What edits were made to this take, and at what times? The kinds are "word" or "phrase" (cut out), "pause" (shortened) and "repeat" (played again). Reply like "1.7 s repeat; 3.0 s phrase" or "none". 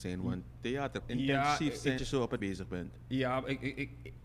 1.0 s phrase; 2.0 s word; 2.4 s word